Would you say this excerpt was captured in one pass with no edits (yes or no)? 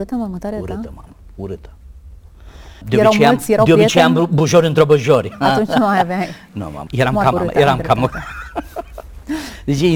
no